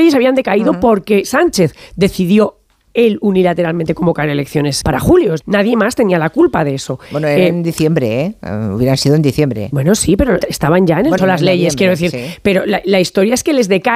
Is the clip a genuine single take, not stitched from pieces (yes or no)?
no